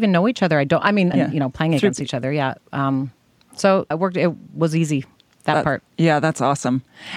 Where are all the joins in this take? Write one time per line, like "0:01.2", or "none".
0:01.1
0:03.9
0:05.2
0:05.9